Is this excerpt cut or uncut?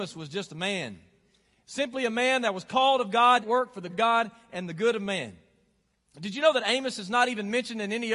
cut